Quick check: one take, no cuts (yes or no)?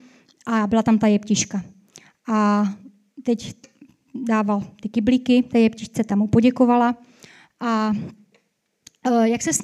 yes